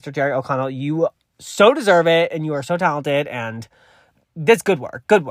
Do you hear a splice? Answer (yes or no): no